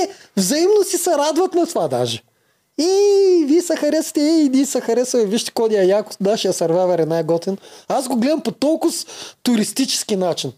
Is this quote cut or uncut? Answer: uncut